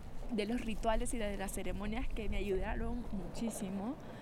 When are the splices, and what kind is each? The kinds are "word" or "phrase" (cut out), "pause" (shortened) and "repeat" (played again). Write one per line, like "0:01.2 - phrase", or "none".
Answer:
none